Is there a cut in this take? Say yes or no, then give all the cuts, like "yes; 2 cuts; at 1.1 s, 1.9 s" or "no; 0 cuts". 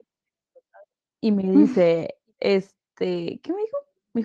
yes; 1 cut; at 2.3 s